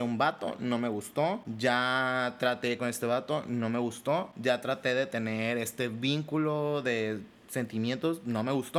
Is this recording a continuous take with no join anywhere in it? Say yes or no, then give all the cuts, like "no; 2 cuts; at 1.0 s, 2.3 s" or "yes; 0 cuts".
no; 1 cut; at 2.8 s